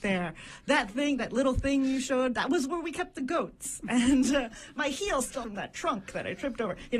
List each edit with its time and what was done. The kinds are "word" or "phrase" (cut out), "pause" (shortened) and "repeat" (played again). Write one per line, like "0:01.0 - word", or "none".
0:05.4 - word